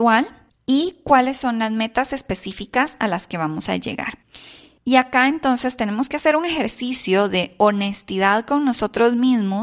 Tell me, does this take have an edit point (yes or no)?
no